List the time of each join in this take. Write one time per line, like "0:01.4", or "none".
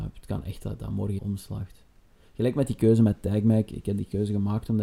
0:01.2